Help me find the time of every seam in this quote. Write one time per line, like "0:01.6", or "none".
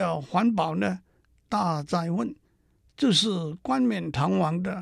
none